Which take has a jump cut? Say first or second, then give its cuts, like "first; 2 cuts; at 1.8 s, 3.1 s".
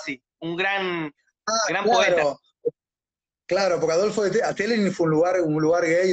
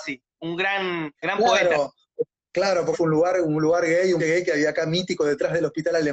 second; 4 cuts; at 1.2 s, 2.4 s, 2.9 s, 4.2 s